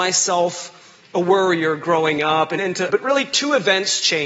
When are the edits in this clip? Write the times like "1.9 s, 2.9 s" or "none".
2.6 s, 2.9 s